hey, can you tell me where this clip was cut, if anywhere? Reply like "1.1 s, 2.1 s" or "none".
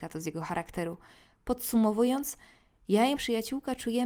3.1 s